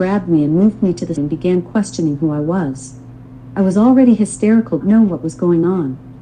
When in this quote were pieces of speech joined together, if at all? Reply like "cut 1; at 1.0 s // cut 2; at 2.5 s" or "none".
cut 1; at 1.2 s // cut 2; at 4.8 s